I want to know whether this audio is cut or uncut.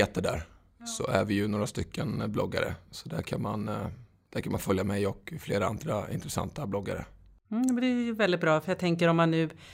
uncut